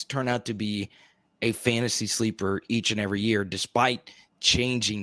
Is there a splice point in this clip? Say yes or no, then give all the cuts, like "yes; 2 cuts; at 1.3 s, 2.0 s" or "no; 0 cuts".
no; 0 cuts